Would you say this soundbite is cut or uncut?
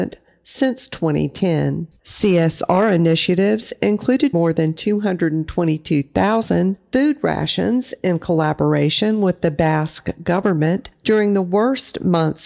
cut